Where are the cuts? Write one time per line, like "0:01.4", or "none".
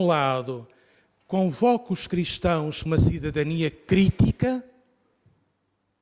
0:02.9